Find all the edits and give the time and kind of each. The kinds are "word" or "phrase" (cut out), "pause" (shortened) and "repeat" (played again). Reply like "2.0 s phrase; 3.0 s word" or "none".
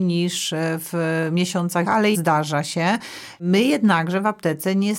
1.8 s word; 2.1 s word